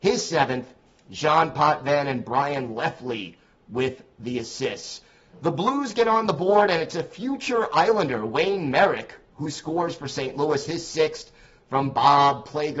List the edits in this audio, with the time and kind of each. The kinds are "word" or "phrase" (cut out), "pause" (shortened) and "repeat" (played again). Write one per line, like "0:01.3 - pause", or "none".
none